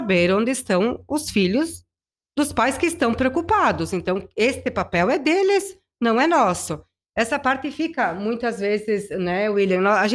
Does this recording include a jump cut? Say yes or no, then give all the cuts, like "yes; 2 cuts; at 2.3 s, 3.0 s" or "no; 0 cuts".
no; 0 cuts